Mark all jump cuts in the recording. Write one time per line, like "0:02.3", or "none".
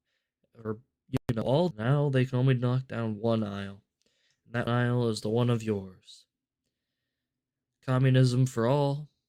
0:01.7
0:04.7

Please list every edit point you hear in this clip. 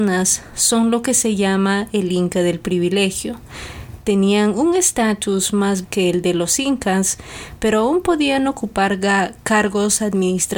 0:05.8

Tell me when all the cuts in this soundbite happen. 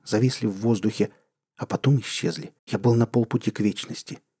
0:02.6

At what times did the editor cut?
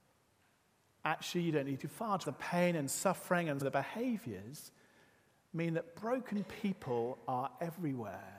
0:02.2
0:03.6

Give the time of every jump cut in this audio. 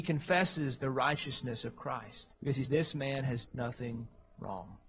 0:02.3
0:02.7
0:03.5

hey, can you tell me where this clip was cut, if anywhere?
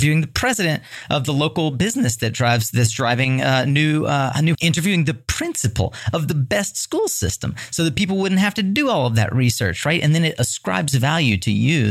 0:04.5

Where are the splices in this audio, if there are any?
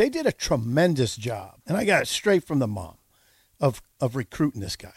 0:01.6
0:03.9

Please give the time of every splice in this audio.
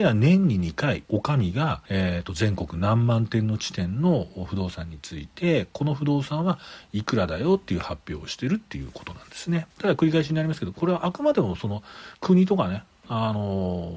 0:01.0
0:01.9
0:09.7
0:12.1

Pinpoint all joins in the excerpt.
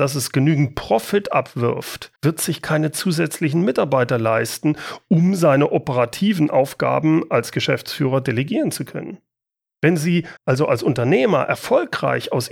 0:02.2
0:09.4
0:10.4

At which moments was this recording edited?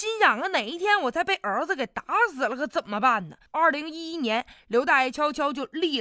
0:03.5

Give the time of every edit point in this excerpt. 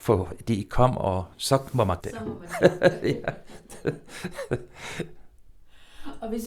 0:01.3
0:02.0

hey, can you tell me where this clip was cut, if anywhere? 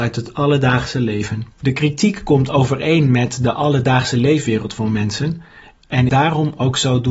0:01.5
0:06.1

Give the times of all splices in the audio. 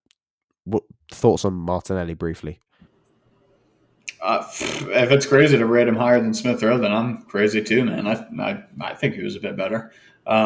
none

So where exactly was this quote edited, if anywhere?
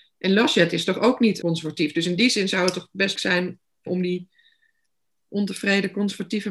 0:01.4
0:03.2
0:03.9

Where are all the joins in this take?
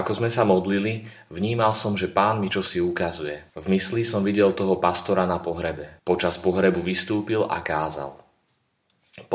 0:03.5
0:06.0

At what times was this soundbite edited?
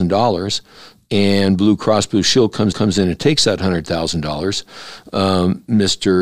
0:02.7

